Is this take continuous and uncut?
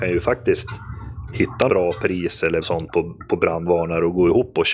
no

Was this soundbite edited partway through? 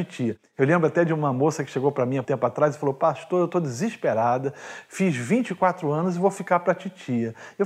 yes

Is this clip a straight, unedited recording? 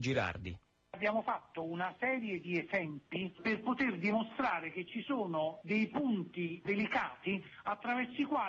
yes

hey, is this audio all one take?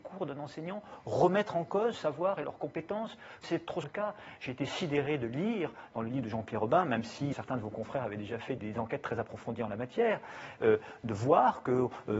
no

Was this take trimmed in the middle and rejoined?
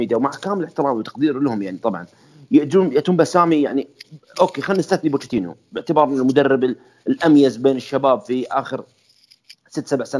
no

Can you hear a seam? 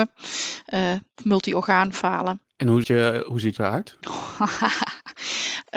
yes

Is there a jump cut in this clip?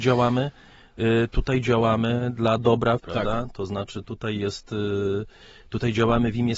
yes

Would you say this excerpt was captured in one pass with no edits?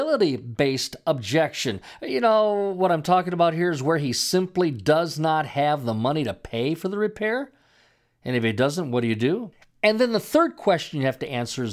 yes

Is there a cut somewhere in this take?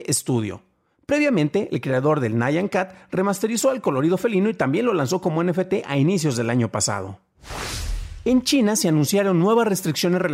no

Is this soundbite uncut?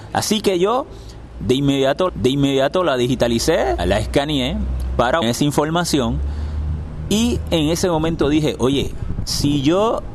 no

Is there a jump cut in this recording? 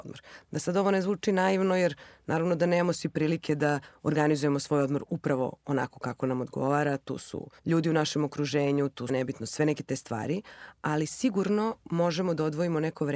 yes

